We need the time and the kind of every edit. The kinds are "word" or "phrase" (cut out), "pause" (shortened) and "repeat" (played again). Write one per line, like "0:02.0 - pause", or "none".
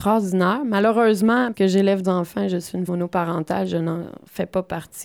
0:01.5 - word
0:02.0 - word
0:02.9 - word